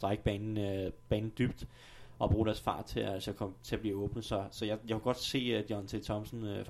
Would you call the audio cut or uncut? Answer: uncut